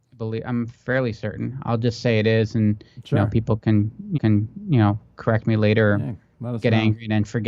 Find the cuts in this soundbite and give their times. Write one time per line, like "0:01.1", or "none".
0:04.1